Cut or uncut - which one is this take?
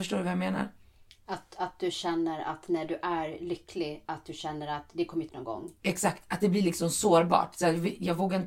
cut